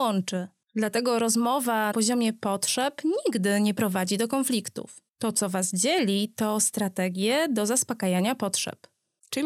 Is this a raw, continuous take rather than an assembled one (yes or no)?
no